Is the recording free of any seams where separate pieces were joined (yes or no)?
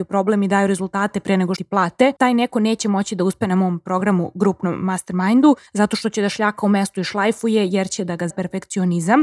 no